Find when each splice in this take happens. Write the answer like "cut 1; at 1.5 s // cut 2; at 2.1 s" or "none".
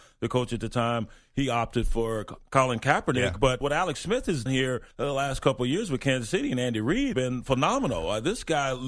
cut 1; at 3.6 s // cut 2; at 4.5 s // cut 3; at 4.9 s // cut 4; at 7.1 s